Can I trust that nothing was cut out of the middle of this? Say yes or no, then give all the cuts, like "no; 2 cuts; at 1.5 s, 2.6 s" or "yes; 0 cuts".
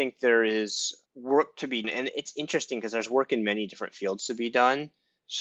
no; 2 cuts; at 1.0 s, 1.8 s